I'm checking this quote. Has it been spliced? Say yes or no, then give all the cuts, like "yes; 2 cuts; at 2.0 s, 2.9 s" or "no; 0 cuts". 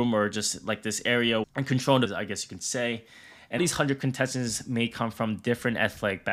yes; 3 cuts; at 1.4 s, 2.1 s, 3.6 s